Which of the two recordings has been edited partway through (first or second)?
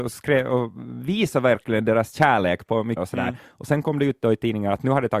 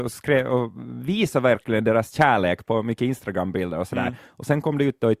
first